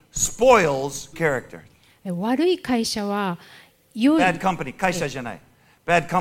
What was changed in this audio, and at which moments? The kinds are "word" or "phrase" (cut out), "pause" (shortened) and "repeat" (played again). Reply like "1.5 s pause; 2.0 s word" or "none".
1.1 s word